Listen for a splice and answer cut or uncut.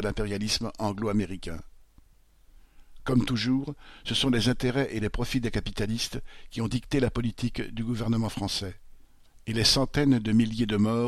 uncut